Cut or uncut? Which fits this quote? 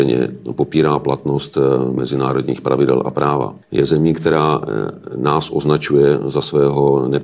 cut